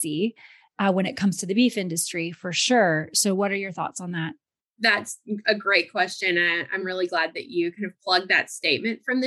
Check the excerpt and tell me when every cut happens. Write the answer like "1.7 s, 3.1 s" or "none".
none